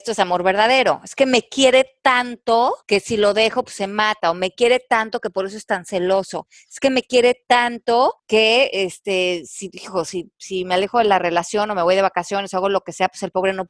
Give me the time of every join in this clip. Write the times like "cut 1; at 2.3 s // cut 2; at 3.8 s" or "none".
cut 1; at 2.8 s // cut 2; at 8.2 s

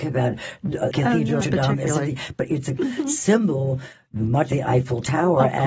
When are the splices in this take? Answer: cut 1; at 0.9 s // cut 2; at 1.4 s // cut 3; at 2.8 s // cut 4; at 4.5 s

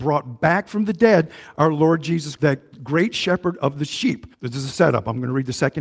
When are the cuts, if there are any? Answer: cut 1; at 2.4 s // cut 2; at 4.3 s

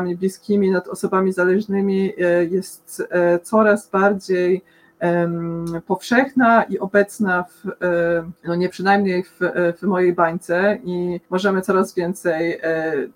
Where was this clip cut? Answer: cut 1; at 8.4 s // cut 2; at 8.7 s // cut 3; at 11.3 s

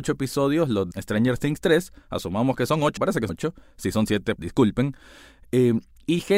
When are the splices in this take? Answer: cut 1; at 0.9 s // cut 2; at 3.0 s // cut 3; at 3.3 s // cut 4; at 4.4 s

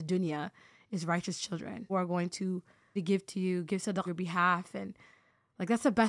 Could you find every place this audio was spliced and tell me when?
cut 1; at 1.9 s // cut 2; at 3.0 s // cut 3; at 4.1 s

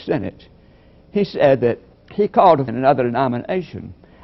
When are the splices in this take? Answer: cut 1; at 1.9 s // cut 2; at 2.7 s

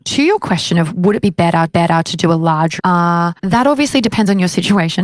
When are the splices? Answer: cut 1; at 1.7 s // cut 2; at 2.8 s // cut 3; at 3.4 s

